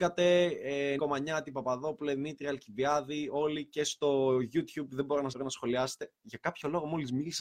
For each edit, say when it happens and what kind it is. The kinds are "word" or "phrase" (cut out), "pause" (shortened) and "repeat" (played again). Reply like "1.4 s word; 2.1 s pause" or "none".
1.0 s word; 5.3 s word